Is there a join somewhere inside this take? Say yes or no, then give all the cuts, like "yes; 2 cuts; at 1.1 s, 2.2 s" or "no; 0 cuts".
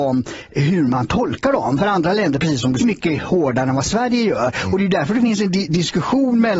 yes; 1 cut; at 2.8 s